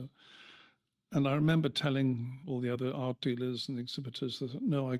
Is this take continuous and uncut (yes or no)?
yes